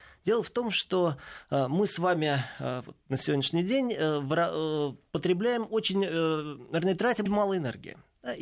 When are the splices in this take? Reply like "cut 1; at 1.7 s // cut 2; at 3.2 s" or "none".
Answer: cut 1; at 7.3 s